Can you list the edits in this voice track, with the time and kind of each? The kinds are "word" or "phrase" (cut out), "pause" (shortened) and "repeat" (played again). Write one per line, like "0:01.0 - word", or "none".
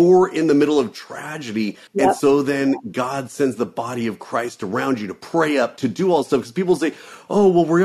0:01.9 - pause